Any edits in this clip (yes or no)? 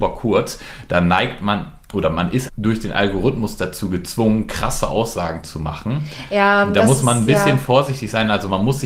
yes